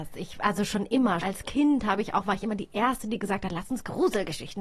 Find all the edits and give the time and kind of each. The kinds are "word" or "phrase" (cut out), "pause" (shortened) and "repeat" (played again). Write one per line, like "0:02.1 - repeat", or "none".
0:01.2 - word